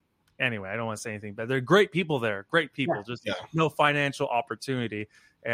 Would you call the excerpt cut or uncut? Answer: uncut